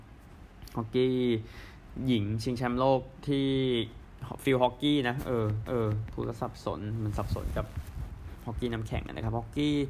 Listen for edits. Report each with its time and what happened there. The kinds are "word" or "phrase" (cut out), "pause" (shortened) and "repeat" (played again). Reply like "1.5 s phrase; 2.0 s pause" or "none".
5.7 s repeat